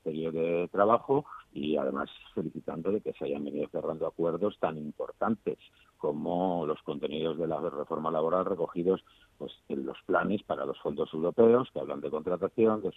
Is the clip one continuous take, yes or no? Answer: yes